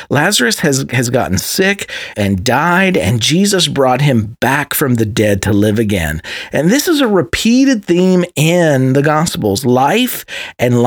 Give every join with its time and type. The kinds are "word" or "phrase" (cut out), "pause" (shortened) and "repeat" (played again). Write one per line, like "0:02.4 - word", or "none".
0:02.1 - word